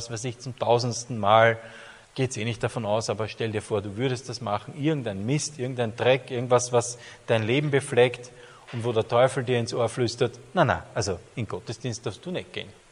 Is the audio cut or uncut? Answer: cut